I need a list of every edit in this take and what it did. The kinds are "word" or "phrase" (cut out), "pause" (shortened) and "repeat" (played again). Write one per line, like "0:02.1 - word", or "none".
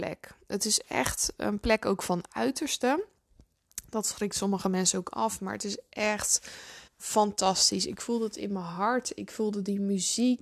0:06.9 - pause